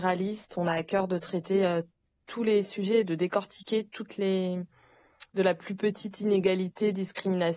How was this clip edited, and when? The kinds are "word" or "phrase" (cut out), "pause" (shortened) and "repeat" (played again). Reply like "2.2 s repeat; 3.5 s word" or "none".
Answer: none